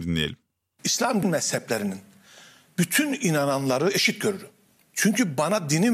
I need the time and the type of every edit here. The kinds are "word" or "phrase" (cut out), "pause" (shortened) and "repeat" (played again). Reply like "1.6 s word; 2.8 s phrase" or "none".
1.2 s phrase